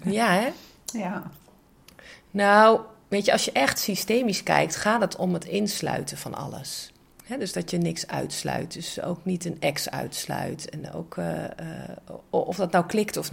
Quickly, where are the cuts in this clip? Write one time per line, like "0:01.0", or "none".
none